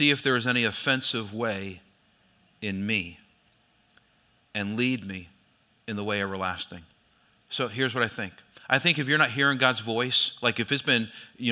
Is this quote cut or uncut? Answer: uncut